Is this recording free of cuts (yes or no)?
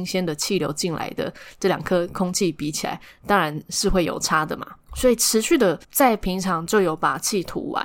no